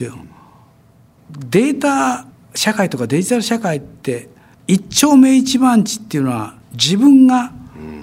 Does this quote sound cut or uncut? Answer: cut